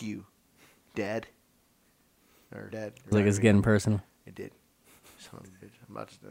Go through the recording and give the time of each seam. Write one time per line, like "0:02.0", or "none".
0:02.7
0:03.1